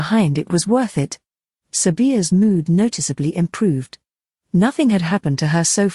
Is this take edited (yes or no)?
no